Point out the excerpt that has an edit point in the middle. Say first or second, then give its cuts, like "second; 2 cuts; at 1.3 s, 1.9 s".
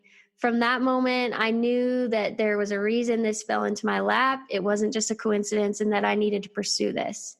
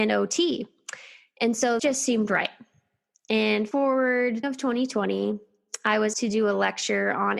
second; 4 cuts; at 1.8 s, 3.7 s, 4.4 s, 6.1 s